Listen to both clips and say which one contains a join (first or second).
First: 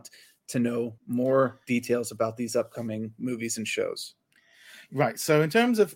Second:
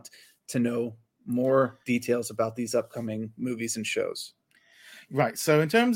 first